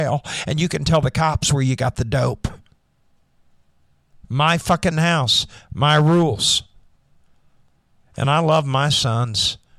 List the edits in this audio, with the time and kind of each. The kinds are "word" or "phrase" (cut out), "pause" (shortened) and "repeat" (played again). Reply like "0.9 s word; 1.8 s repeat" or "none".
none